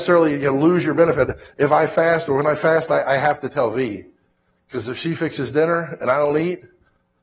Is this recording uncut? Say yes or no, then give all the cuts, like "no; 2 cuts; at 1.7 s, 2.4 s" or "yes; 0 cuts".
yes; 0 cuts